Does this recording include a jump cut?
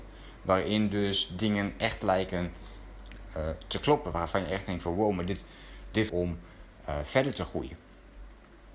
yes; 1 cut; at 6.1 s

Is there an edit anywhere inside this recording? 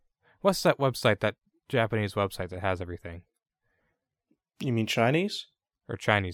no; 0 cuts

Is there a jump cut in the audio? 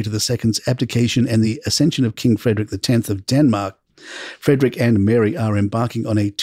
no; 0 cuts

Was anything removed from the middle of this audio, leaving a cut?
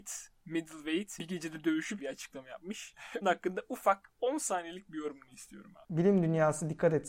yes; 3 cuts; at 1.2 s, 2.0 s, 3.2 s

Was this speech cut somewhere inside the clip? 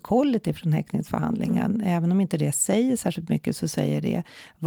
no; 0 cuts

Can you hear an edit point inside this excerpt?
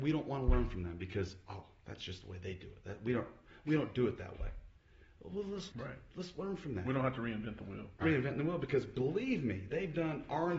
yes; 2 cuts; at 5.7 s, 8.0 s

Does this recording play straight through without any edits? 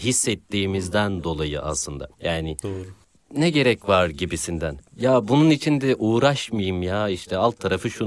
no; 1 cut; at 2.1 s

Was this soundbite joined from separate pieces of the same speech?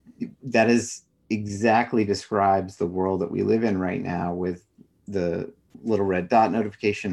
no; 0 cuts

